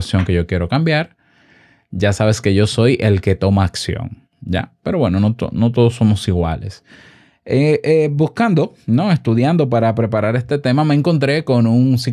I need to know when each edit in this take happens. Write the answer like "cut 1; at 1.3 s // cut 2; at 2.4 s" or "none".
none